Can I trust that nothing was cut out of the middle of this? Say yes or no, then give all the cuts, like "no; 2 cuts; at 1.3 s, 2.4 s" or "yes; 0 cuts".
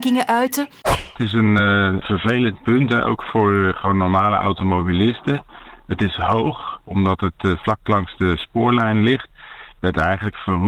yes; 0 cuts